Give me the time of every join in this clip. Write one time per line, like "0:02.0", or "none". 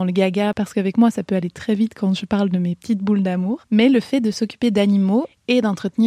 none